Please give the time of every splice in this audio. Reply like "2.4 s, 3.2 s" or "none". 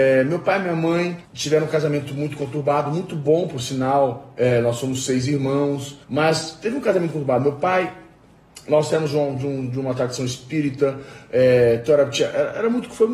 1.2 s, 6.0 s